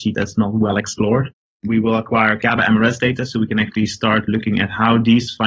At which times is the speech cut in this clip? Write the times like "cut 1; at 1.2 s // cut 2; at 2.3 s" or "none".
none